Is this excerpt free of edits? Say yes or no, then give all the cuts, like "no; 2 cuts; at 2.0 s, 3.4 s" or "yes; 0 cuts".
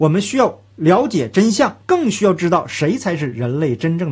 no; 1 cut; at 1.8 s